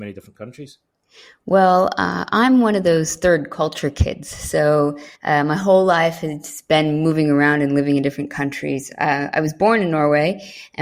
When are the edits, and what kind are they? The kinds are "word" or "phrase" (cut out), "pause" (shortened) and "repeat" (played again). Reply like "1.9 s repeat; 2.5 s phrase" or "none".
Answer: 5.1 s pause